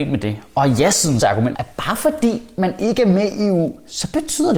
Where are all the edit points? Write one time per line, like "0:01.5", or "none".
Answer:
0:01.2
0:01.5